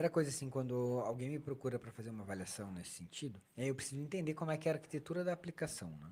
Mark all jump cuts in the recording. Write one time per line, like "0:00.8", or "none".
0:03.4